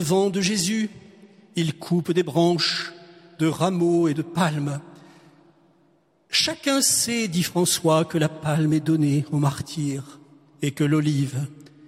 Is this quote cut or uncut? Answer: uncut